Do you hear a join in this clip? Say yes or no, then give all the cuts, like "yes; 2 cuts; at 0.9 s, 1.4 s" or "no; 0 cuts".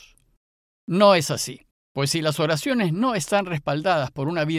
yes; 1 cut; at 1.7 s